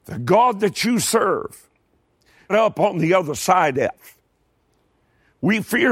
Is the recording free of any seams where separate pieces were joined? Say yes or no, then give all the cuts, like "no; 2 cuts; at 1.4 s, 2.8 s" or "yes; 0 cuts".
no; 2 cuts; at 2.5 s, 3.7 s